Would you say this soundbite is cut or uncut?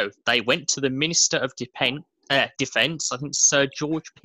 uncut